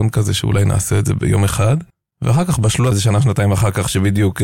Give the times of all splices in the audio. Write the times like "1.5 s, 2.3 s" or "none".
1.9 s, 2.9 s